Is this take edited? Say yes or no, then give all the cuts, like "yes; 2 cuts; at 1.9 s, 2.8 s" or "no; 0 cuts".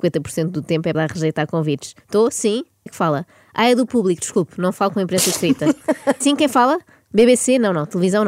yes; 4 cuts; at 0.9 s, 2.0 s, 2.9 s, 6.2 s